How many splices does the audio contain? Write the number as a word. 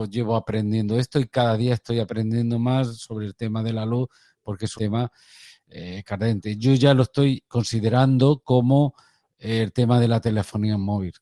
two